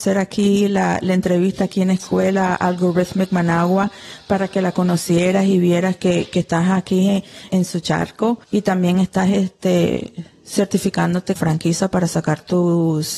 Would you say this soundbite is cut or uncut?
cut